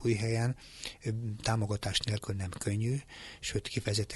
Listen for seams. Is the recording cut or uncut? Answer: uncut